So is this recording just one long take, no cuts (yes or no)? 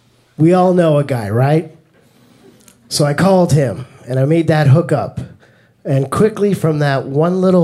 yes